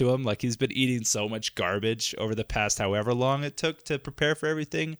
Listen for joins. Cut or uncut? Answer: uncut